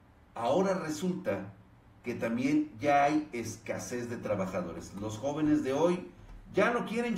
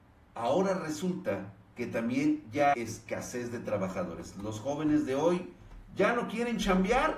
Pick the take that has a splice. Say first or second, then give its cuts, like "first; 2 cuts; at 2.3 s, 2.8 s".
second; 2 cuts; at 1.6 s, 2.7 s